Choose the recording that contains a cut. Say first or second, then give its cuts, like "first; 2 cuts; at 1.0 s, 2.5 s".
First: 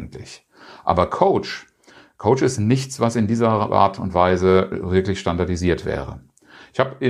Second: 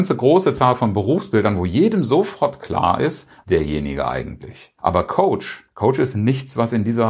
second; 3 cuts; at 3.4 s, 4.8 s, 5.7 s